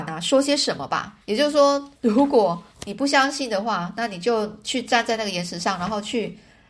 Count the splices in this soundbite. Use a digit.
3